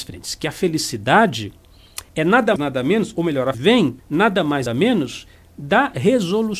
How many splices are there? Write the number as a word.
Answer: six